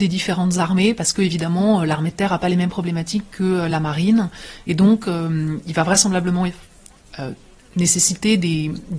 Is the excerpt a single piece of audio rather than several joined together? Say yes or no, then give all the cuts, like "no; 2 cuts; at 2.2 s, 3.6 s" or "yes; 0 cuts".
yes; 0 cuts